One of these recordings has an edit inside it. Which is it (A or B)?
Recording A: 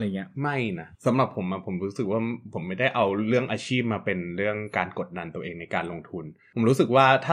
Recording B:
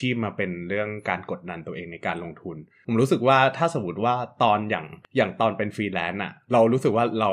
A